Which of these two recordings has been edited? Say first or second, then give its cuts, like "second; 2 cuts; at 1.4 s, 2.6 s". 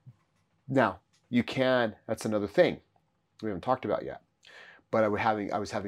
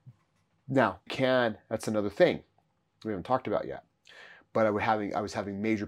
second; 1 cut; at 1.1 s